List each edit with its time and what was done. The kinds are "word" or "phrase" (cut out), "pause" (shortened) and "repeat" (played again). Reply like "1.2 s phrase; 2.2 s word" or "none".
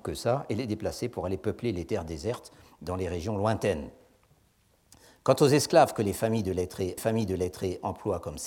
7.0 s repeat